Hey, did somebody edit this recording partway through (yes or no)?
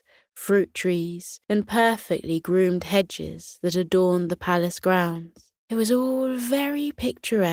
yes